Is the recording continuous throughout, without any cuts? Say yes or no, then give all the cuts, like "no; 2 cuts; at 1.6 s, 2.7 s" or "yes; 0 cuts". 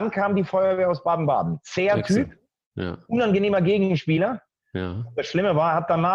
yes; 0 cuts